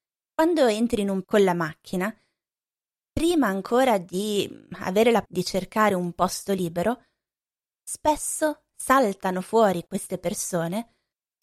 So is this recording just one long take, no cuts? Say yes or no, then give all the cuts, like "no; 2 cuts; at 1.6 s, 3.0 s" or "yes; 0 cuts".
no; 2 cuts; at 1.2 s, 5.3 s